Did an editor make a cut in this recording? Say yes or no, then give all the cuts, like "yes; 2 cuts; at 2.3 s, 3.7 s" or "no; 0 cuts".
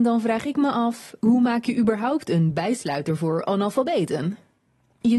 no; 0 cuts